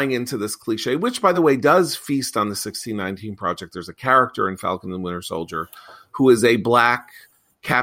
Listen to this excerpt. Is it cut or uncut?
uncut